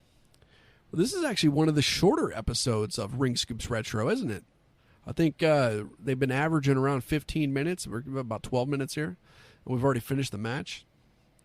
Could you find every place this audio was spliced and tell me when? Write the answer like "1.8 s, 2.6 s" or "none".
none

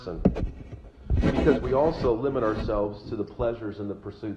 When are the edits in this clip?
none

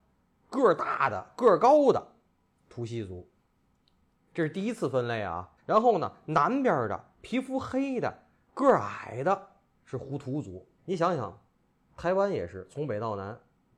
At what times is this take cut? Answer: 5.6 s, 10.8 s

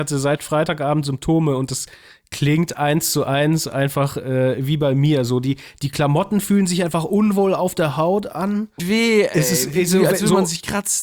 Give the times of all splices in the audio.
8.8 s

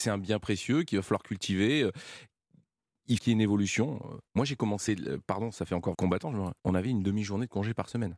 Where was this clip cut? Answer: 3.2 s, 4.3 s, 5.9 s, 6.6 s

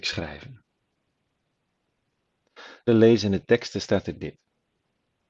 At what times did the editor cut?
2.9 s

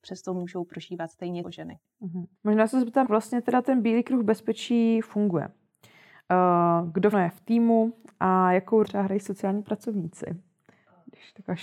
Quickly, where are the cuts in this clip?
1.4 s, 2.4 s, 3.0 s, 7.1 s, 8.8 s

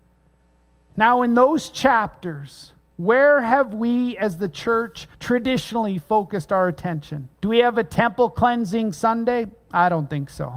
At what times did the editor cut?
5.1 s, 7.3 s

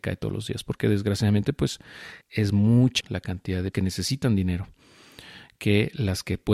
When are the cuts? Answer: 2.2 s, 3.0 s, 3.7 s

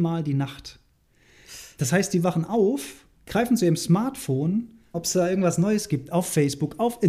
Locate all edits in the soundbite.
3.2 s, 4.9 s

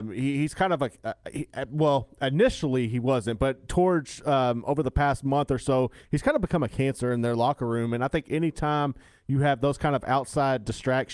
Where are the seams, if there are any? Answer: none

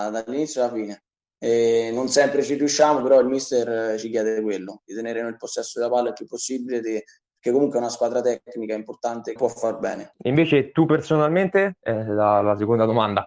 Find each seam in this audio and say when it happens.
9.4 s

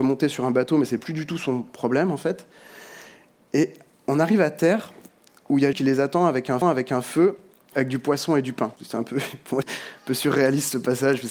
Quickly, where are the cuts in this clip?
5.7 s, 6.6 s, 7.7 s, 8.8 s, 9.6 s

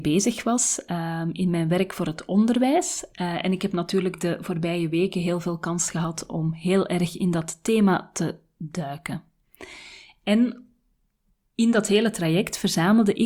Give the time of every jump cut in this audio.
none

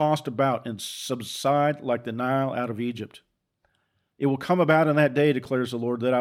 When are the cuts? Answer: none

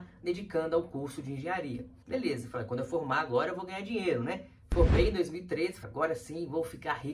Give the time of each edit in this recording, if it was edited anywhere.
2.0 s, 5.8 s

